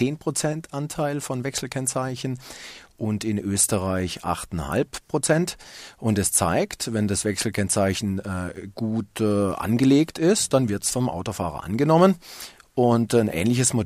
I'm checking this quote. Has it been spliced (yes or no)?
no